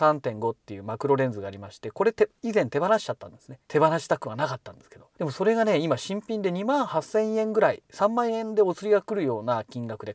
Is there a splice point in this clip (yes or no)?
yes